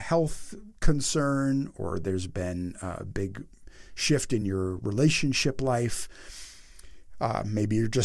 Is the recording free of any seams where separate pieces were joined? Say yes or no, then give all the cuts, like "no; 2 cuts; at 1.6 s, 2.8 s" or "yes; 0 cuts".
yes; 0 cuts